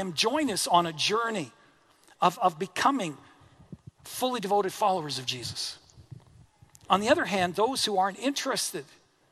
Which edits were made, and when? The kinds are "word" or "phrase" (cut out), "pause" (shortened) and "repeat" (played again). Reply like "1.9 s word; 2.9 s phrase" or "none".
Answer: 6.4 s pause